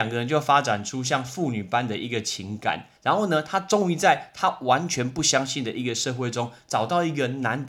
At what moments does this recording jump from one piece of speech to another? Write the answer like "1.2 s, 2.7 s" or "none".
3.0 s